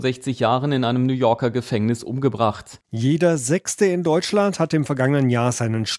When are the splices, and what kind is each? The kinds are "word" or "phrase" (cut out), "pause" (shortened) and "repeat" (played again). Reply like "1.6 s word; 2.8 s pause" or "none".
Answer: 2.8 s pause